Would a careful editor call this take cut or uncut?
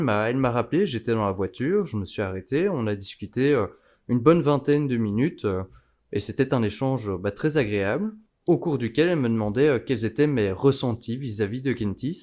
uncut